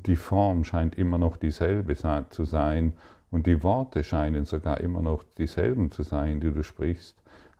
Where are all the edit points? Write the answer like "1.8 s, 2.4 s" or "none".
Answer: none

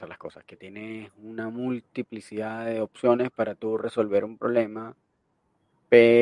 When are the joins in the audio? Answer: none

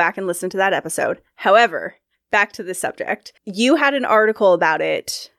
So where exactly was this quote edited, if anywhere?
2.1 s, 3.4 s

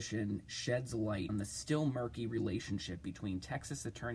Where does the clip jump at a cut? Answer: 1.3 s

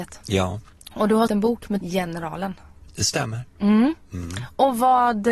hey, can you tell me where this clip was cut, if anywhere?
1.3 s, 1.8 s

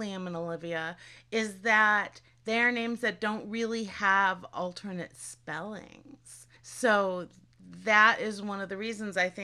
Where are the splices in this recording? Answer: 6.6 s

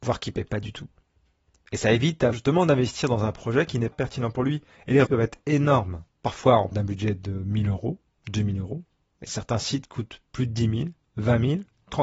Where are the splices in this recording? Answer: 2.3 s, 3.9 s, 4.7 s, 5.1 s, 6.1 s, 6.7 s

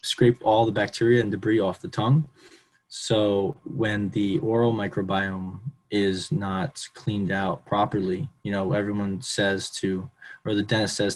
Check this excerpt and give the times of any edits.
none

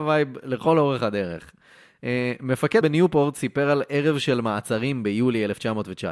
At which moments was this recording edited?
2.8 s

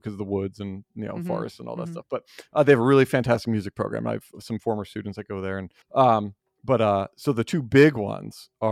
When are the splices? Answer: 5.8 s

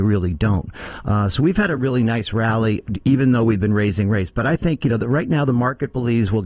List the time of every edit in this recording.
none

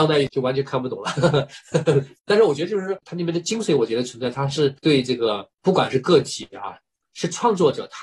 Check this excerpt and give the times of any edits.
7.1 s

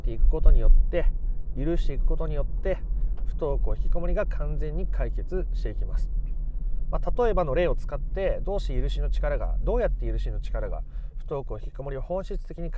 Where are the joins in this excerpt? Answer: none

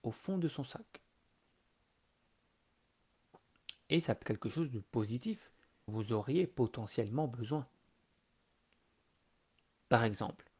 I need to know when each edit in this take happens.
4.2 s, 5.9 s

